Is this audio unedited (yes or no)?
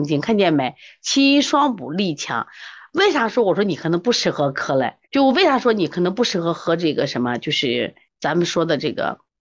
no